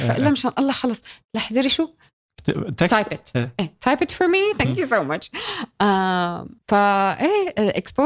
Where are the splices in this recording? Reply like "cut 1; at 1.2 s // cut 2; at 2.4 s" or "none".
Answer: cut 1; at 6.6 s